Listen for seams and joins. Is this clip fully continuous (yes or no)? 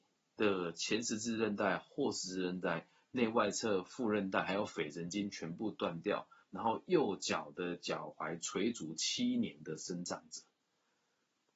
yes